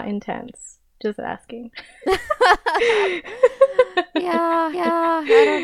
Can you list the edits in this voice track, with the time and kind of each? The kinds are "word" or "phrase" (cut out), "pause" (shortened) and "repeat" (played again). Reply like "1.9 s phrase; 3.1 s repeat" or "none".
4.7 s repeat